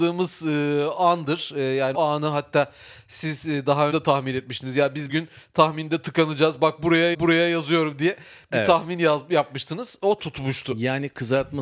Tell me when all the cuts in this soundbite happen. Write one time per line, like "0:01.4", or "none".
0:01.9
0:03.9
0:05.1
0:07.1
0:10.2